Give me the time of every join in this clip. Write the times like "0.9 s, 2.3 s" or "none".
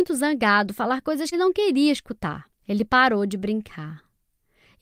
1.3 s, 2.6 s